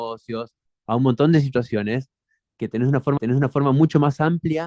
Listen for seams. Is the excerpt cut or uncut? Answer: cut